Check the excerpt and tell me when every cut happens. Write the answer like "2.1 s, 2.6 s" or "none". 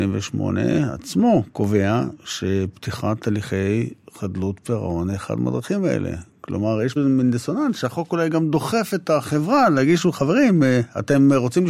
7.0 s